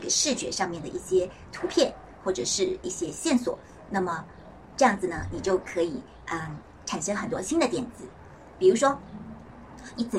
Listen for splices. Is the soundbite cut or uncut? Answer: uncut